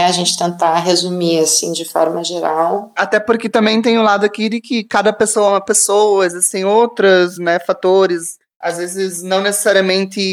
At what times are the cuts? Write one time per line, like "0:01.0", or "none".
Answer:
none